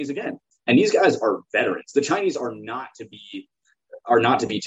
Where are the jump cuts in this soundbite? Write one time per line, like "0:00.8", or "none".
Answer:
none